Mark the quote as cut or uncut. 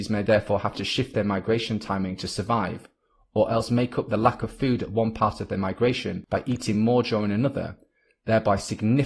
uncut